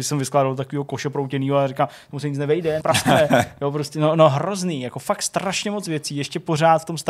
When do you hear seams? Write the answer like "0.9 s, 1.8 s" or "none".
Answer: 2.8 s